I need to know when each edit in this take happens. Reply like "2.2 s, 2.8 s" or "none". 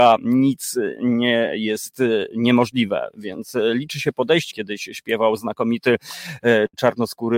4.5 s